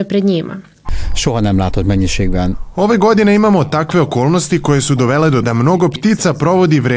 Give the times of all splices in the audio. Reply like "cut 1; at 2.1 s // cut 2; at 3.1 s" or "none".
cut 1; at 5.4 s